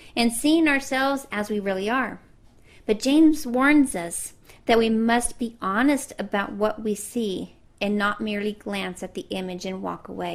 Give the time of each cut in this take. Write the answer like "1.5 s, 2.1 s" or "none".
none